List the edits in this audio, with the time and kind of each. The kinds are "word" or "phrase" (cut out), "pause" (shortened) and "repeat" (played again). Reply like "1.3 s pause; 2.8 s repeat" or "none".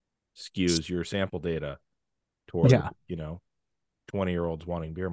none

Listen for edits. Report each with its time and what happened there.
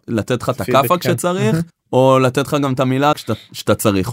1.7 s pause; 3.1 s word

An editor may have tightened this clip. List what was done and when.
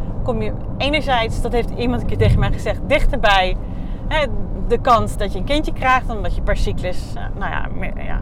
5.2 s word

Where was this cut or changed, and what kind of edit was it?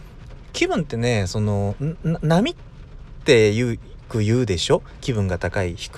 5.0 s phrase

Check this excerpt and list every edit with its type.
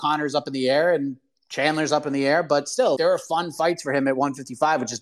3.0 s word

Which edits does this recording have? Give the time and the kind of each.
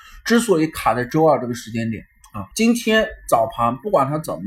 2.5 s pause

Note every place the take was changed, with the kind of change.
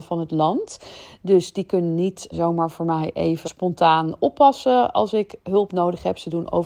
2.3 s word; 3.4 s word

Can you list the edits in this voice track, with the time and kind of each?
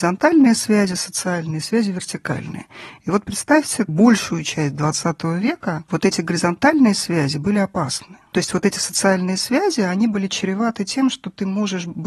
none

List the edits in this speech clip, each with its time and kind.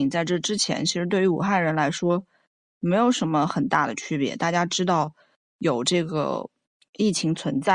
none

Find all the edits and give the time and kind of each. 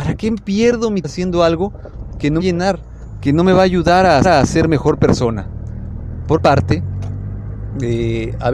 1.0 s word; 2.4 s phrase; 4.2 s repeat; 6.4 s word

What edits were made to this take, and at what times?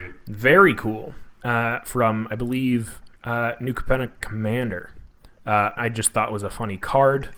3.2 s pause; 5.8 s word

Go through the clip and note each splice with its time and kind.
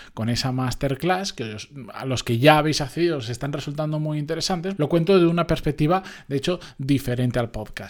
4.8 s phrase

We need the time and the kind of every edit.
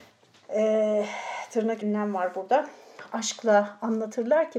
1.8 s word

